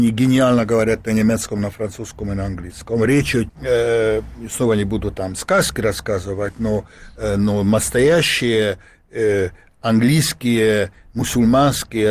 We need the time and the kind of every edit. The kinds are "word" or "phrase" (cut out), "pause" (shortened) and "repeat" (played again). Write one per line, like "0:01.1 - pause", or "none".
0:03.5 - phrase